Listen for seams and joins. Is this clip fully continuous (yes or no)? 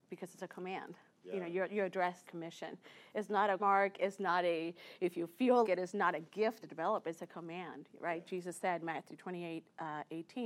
no